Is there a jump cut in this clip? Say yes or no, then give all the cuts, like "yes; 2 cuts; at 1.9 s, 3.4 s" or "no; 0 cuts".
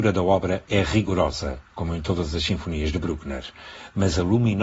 no; 0 cuts